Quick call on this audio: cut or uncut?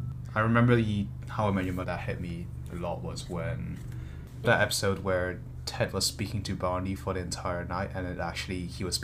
cut